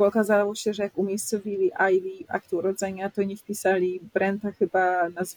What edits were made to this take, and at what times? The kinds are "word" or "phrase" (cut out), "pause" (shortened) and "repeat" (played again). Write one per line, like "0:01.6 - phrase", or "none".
none